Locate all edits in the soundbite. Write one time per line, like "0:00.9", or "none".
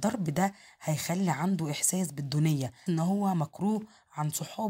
0:02.9